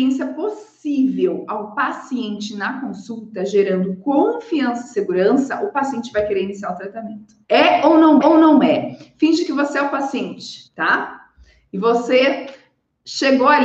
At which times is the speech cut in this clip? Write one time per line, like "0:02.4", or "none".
0:07.4
0:08.2
0:10.7